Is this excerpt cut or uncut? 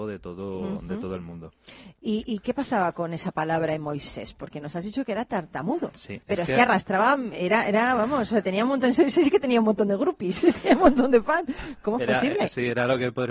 uncut